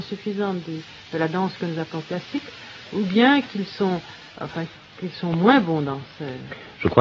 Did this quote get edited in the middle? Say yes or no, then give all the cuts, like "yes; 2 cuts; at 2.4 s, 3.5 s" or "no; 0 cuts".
no; 0 cuts